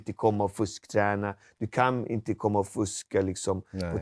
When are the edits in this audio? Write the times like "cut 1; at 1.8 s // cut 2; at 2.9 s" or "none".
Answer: none